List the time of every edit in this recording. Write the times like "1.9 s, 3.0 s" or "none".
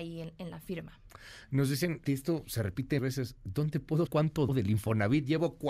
2.0 s, 3.0 s, 4.1 s, 4.5 s